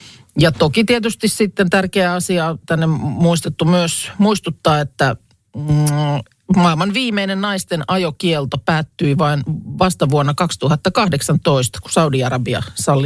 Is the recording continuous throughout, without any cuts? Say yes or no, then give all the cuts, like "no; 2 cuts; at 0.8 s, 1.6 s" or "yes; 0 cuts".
yes; 0 cuts